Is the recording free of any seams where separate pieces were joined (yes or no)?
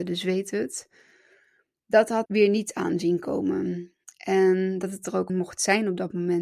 no